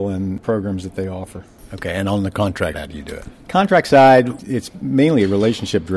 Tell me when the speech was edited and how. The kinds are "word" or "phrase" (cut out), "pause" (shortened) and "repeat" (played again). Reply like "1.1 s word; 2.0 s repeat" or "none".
2.7 s word